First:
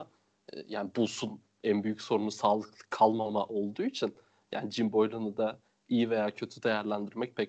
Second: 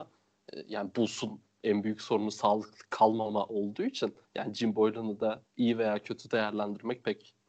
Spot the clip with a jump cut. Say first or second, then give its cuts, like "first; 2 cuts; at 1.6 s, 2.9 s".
second; 2 cuts; at 4.2 s, 5.5 s